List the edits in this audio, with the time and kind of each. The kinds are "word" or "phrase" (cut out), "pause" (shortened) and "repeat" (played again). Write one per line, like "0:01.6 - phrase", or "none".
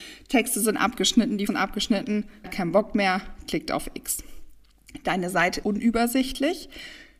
0:01.5 - word
0:02.4 - word
0:05.6 - word